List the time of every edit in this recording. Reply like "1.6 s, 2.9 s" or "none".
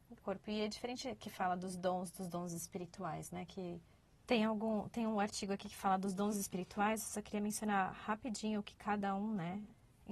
4.0 s